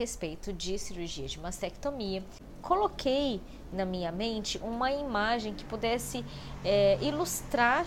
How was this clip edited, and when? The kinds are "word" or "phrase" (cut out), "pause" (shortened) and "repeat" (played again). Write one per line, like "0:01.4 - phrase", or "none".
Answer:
0:03.7 - word